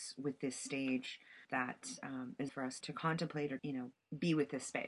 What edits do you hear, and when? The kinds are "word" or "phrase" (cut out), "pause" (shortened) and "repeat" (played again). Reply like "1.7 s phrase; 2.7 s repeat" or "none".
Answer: 1.4 s pause; 2.5 s word; 2.8 s word; 3.6 s word